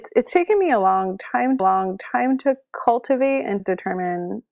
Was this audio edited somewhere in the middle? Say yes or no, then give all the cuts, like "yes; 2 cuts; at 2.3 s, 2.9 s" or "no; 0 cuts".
yes; 2 cuts; at 1.6 s, 3.6 s